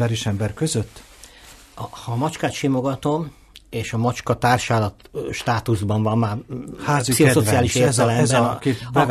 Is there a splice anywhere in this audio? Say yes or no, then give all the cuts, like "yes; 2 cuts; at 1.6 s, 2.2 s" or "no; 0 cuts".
no; 0 cuts